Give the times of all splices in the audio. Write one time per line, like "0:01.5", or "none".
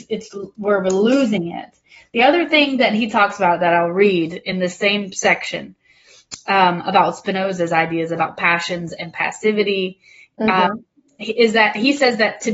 none